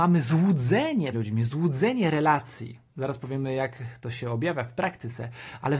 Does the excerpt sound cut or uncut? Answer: cut